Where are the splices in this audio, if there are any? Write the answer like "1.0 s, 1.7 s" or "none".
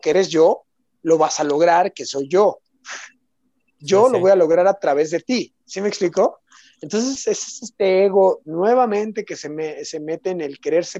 5.6 s